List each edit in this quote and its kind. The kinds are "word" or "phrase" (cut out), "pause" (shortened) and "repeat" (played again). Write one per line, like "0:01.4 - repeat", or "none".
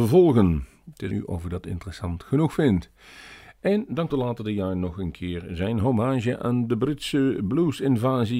0:01.1 - word
0:04.1 - word